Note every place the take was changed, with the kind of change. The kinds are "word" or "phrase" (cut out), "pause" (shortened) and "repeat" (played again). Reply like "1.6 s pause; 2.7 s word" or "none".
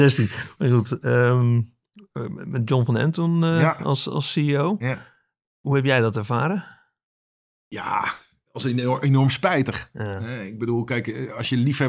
none